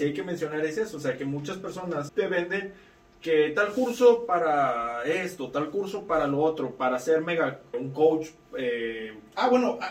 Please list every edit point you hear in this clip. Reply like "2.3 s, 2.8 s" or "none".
2.1 s, 7.7 s